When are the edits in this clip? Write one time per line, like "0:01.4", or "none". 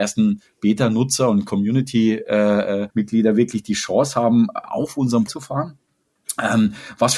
0:02.9
0:05.3